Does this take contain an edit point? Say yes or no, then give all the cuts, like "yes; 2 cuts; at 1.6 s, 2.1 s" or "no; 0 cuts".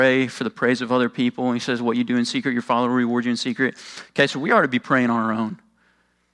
no; 0 cuts